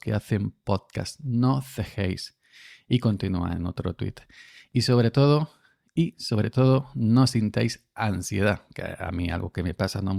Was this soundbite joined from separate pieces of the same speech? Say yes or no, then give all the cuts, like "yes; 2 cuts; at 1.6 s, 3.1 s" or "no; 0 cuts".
no; 0 cuts